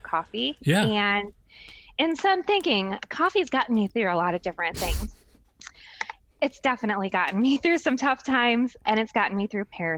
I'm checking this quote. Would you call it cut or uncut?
uncut